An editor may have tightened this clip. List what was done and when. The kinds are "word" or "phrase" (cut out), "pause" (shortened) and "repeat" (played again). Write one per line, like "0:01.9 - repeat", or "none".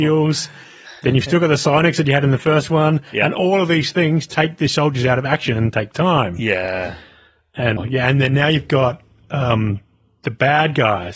0:07.8 - word